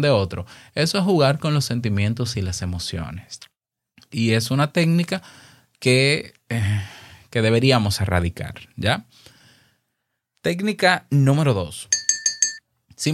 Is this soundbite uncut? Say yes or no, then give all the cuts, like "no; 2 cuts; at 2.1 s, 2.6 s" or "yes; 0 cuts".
yes; 0 cuts